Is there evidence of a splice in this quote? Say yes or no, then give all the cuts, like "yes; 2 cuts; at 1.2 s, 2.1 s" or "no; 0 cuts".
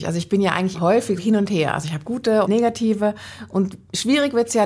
yes; 2 cuts; at 1.2 s, 2.5 s